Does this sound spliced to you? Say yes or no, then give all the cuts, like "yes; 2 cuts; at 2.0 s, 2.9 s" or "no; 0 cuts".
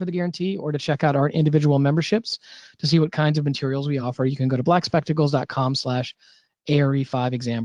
no; 0 cuts